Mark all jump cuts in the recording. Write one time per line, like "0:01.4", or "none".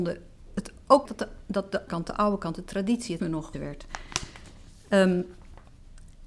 0:01.0
0:01.9
0:03.2
0:03.5